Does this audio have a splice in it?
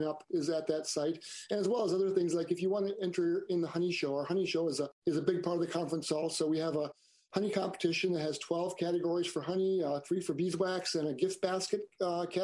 no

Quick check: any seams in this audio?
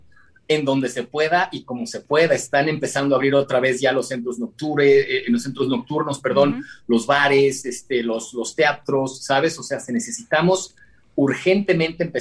no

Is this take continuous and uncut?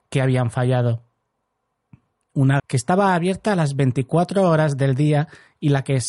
no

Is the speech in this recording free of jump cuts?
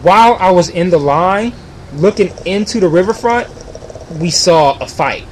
yes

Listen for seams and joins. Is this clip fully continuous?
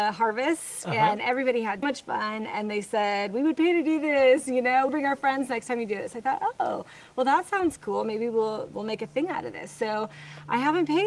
no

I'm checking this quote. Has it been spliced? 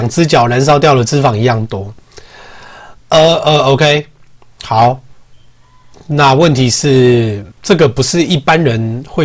yes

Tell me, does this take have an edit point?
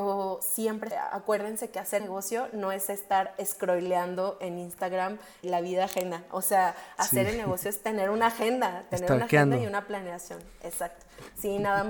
yes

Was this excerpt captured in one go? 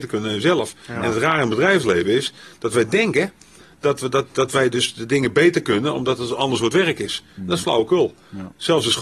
yes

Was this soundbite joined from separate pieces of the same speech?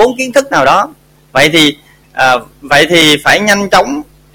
no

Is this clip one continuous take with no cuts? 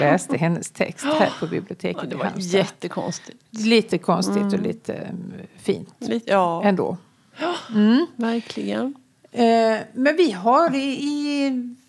yes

